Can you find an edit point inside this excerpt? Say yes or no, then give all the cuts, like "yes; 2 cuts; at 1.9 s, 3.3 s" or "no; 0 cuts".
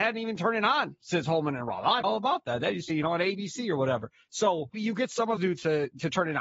yes; 4 cuts; at 2.0 s, 2.9 s, 4.7 s, 5.4 s